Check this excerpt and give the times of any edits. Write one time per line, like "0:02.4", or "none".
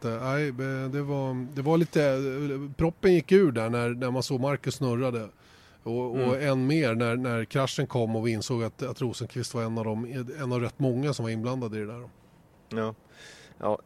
none